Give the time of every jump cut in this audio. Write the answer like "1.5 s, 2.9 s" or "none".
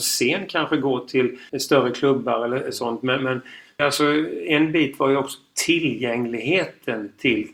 1.5 s, 3.8 s

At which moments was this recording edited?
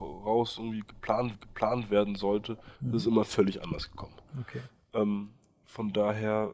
1.3 s, 2.8 s

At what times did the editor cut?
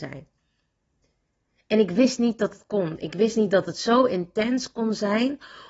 none

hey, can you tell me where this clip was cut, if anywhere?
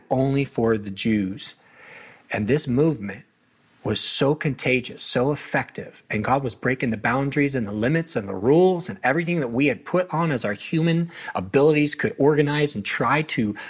none

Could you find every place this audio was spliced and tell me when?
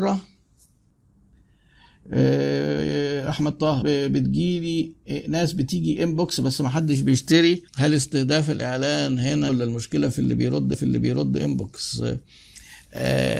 3.8 s, 7.7 s, 9.5 s, 10.7 s

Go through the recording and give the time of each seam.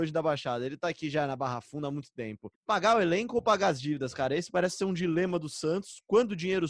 2.5 s

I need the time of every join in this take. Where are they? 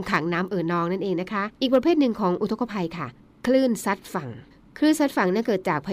1.6 s, 3.2 s, 4.5 s

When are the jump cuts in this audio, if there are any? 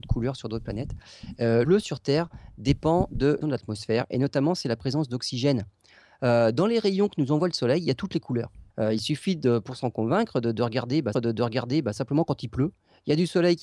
1.6 s, 3.4 s, 8.7 s, 11.1 s

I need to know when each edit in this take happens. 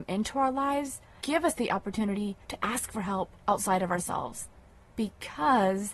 1.2 s, 2.4 s, 3.4 s

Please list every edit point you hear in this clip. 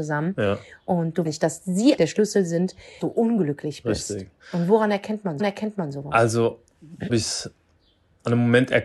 1.2 s, 2.0 s, 3.0 s, 4.4 s, 5.4 s, 7.1 s

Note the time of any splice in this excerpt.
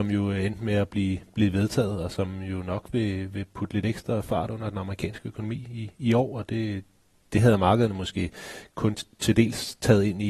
none

